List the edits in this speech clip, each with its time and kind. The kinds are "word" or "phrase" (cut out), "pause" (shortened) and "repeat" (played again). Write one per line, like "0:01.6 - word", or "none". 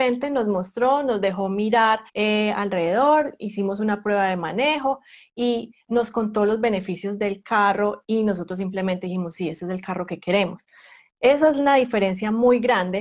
0:02.1 - pause